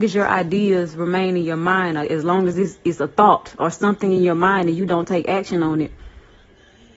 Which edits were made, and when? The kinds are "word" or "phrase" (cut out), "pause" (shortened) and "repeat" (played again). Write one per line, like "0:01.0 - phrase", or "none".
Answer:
none